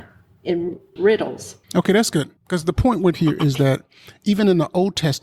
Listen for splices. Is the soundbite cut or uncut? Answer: cut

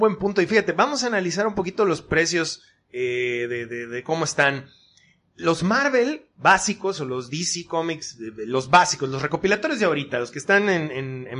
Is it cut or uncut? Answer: uncut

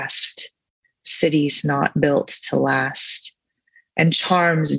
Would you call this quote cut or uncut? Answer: uncut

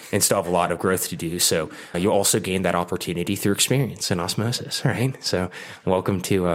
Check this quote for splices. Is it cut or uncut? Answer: cut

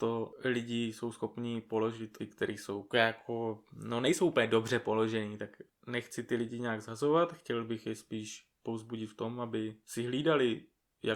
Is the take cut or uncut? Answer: cut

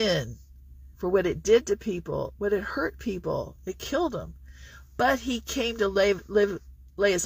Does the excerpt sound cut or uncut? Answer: cut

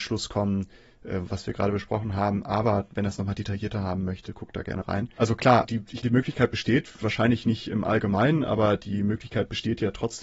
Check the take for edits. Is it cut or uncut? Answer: cut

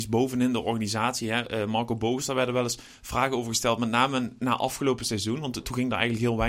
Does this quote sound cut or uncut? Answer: uncut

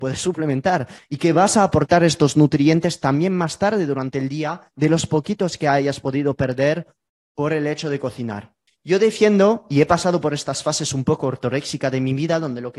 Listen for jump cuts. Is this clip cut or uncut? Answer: uncut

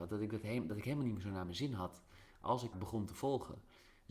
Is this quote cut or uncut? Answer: cut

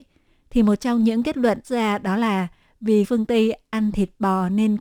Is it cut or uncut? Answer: cut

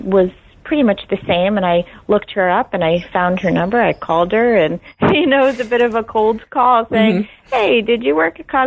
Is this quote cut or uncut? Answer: uncut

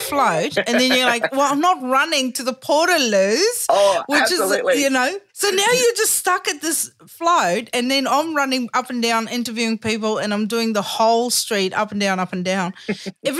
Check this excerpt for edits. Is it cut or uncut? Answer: cut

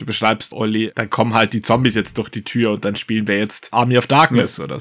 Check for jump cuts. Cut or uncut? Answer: uncut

